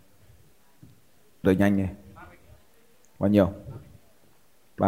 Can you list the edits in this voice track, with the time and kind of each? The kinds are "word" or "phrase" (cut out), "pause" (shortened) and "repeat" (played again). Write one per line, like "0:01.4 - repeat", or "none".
0:01.4 - word